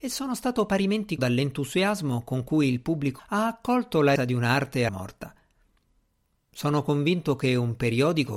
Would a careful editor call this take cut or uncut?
cut